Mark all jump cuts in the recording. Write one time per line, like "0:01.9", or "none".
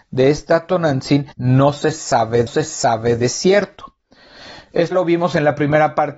0:01.3
0:02.5
0:04.9